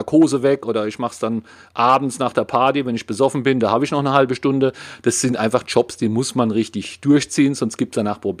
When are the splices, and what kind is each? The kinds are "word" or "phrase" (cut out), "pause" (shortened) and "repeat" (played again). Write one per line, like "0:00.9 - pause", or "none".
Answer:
none